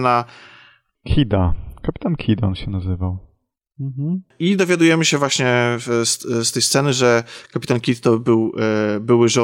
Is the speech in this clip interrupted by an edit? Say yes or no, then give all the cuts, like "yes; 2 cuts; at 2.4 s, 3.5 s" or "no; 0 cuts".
no; 0 cuts